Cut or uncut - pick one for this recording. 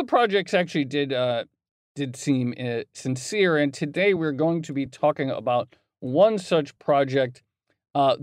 uncut